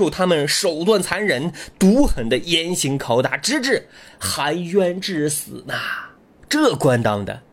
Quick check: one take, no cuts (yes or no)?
yes